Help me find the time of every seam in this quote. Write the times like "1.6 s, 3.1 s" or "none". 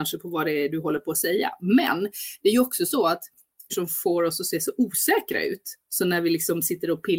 3.7 s